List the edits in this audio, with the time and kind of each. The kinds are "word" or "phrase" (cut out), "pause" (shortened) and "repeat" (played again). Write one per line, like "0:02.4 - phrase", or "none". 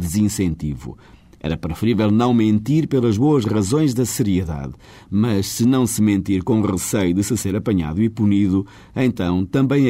none